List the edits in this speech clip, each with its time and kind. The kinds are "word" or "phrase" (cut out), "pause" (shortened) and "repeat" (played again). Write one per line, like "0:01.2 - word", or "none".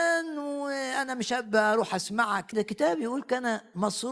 0:02.5 - word